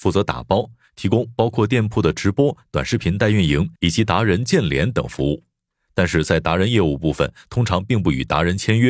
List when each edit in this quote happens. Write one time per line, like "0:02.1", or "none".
0:03.8